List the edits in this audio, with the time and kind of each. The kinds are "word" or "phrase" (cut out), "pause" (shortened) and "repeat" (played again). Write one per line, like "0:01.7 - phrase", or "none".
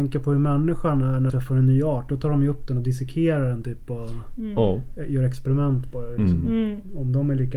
0:01.3 - word